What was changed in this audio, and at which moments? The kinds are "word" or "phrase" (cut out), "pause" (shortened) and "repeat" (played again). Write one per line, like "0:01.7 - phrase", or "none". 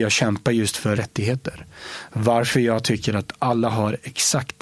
0:01.0 - word